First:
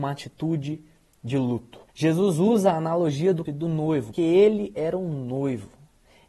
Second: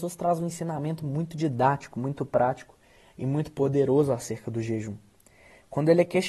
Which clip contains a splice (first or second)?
first